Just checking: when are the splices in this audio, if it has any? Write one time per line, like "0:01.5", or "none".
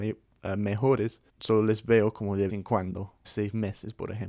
0:01.3
0:02.5
0:03.2